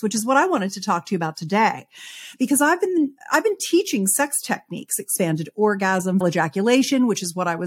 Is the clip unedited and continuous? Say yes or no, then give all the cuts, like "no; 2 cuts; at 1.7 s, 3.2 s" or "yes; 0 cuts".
no; 1 cut; at 6.2 s